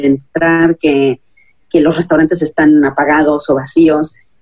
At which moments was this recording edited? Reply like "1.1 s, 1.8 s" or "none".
none